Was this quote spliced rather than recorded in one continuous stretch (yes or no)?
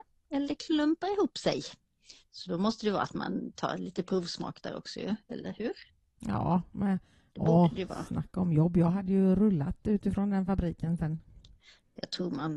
no